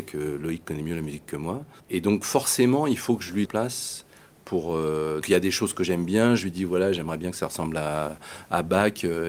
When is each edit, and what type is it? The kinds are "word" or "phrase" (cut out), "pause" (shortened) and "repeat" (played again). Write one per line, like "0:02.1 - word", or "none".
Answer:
0:01.8 - pause
0:03.5 - phrase
0:05.2 - word